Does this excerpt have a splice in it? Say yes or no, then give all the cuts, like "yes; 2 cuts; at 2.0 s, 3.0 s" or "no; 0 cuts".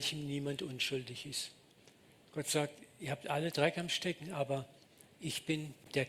no; 0 cuts